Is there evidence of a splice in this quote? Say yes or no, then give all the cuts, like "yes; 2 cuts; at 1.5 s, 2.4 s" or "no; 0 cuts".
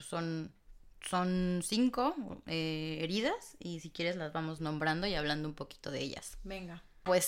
no; 0 cuts